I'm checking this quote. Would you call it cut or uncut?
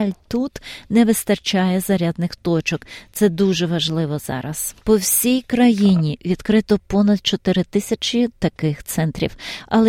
cut